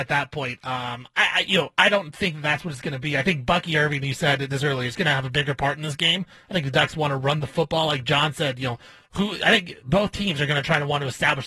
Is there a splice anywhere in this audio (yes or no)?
no